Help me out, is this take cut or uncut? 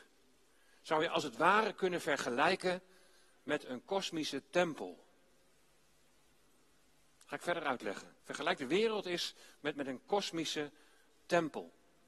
cut